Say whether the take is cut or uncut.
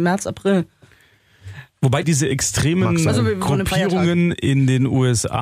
cut